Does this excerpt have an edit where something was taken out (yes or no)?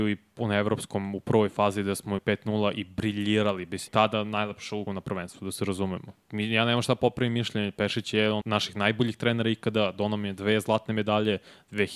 yes